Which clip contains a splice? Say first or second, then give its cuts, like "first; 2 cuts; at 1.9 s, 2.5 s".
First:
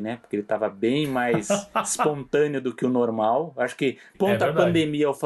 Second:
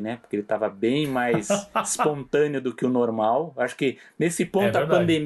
first; 1 cut; at 4.1 s